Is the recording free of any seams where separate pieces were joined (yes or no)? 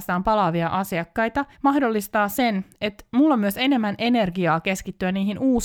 no